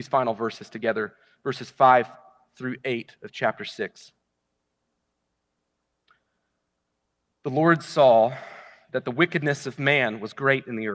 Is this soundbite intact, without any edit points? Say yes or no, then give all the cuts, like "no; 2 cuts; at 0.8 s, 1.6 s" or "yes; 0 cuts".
yes; 0 cuts